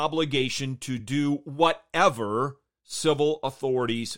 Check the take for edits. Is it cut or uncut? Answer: uncut